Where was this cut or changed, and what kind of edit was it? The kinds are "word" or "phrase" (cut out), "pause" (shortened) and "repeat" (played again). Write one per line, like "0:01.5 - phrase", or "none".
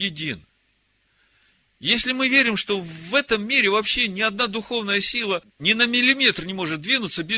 0:05.5 - pause